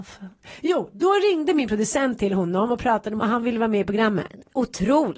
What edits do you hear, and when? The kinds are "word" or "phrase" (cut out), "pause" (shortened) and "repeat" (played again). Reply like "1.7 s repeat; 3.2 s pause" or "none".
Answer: 3.2 s word